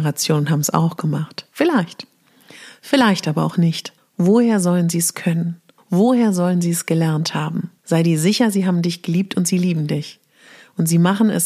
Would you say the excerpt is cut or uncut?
cut